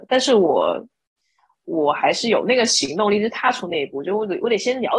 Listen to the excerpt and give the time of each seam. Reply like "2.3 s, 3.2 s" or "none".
none